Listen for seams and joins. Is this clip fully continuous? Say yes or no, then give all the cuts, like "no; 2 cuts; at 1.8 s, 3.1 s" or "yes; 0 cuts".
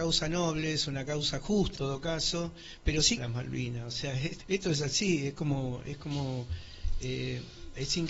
no; 3 cuts; at 1.7 s, 3.2 s, 4.4 s